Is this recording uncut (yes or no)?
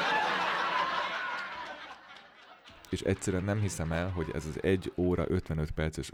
yes